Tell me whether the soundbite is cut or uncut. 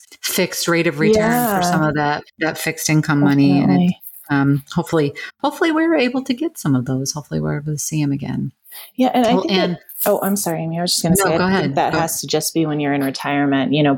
uncut